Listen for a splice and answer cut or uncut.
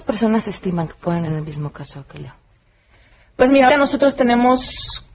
cut